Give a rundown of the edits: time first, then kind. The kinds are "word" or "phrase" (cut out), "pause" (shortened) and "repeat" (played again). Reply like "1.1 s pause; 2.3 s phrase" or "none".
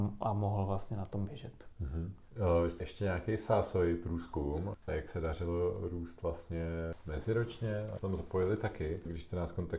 1.7 s pause; 2.8 s word; 8.0 s word